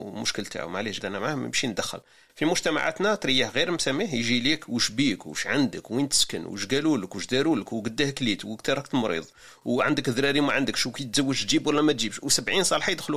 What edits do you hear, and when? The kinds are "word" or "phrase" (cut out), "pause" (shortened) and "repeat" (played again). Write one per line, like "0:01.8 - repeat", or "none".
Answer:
0:01.0 - word

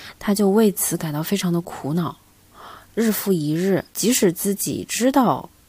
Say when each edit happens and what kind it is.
0:03.9 - pause

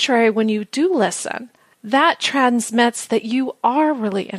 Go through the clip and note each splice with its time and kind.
none

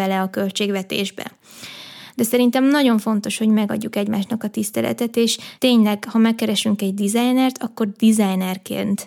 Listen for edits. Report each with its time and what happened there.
0:05.6 - pause

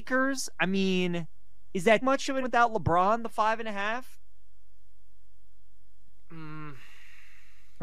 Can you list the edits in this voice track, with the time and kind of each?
0:02.0 - word
0:02.4 - word

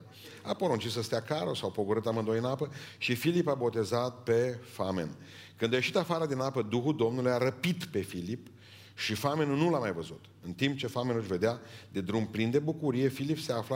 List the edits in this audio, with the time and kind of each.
none

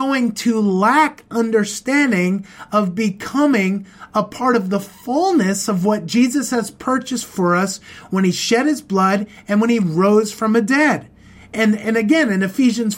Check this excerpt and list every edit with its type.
none

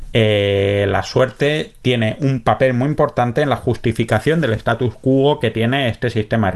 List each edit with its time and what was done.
none

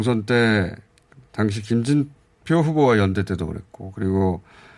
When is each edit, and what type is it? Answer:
none

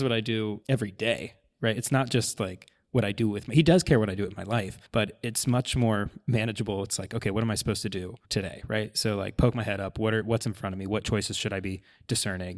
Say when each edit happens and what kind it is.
0:04.8 - pause
0:08.2 - pause

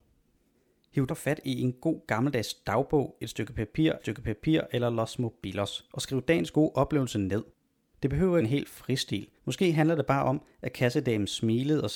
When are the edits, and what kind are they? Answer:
0:01.1 - word
0:04.0 - repeat
0:08.4 - phrase
0:09.4 - pause

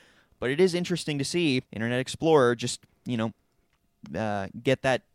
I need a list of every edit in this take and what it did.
0:01.7 - pause

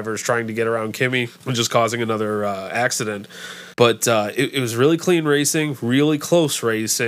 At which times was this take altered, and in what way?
0:03.7 - pause

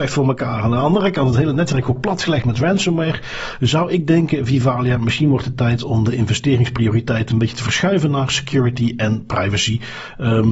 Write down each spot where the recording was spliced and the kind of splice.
none

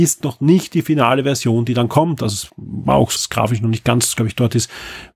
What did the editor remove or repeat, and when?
0:02.5 - word
0:03.2 - word

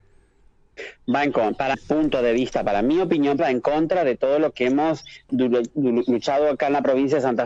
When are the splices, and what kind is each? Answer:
0:01.7 - word
0:03.4 - word

